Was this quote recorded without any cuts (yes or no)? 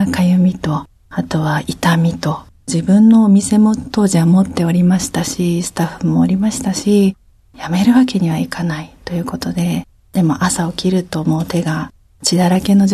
yes